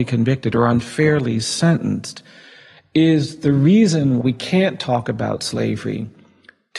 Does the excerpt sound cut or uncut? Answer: cut